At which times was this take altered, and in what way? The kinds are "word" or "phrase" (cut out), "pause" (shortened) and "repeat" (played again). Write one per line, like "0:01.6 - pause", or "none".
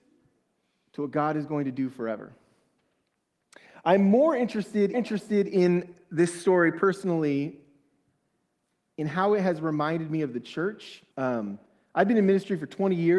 0:04.9 - repeat
0:11.1 - pause